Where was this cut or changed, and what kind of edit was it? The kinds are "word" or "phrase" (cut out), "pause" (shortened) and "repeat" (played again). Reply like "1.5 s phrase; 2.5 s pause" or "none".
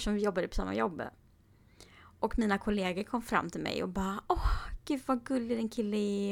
none